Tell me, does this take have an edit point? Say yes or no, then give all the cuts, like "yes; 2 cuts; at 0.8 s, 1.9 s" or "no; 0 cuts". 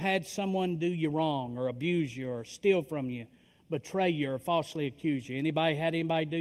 no; 0 cuts